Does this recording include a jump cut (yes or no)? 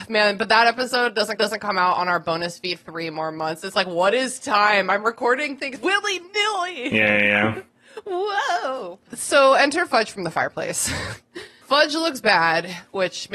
yes